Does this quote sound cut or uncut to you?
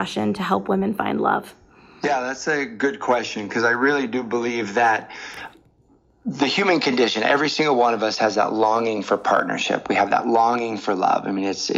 uncut